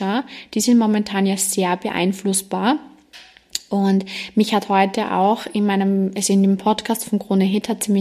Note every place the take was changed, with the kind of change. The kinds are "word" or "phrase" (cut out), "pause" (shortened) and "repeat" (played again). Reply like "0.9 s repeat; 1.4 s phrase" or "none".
none